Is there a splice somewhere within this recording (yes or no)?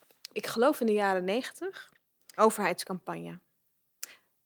yes